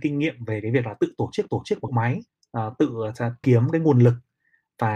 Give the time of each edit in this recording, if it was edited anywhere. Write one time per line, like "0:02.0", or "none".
0:01.5
0:01.9
0:02.3
0:03.4